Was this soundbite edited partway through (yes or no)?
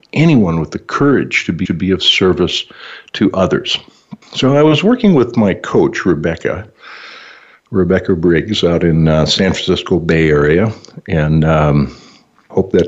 yes